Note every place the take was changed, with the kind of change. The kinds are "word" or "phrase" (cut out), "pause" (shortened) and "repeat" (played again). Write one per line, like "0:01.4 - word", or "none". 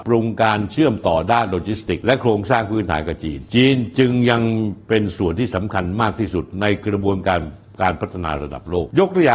none